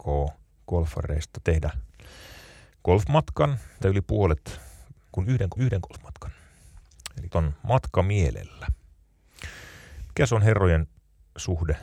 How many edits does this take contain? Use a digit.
4